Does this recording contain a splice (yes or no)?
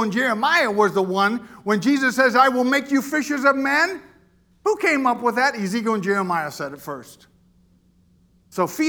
no